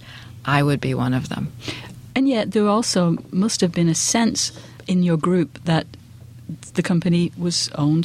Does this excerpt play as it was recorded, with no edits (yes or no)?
yes